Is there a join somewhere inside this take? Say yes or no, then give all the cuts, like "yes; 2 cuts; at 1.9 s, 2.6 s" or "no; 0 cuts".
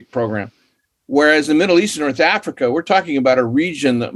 no; 0 cuts